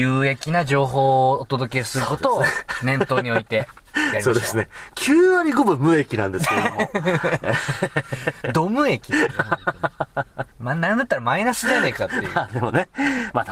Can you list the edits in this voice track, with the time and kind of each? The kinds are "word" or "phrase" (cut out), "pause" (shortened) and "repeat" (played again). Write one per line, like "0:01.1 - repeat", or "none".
none